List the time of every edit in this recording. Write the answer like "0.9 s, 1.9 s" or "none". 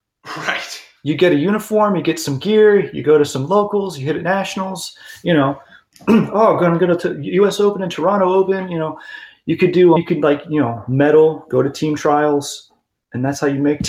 10.0 s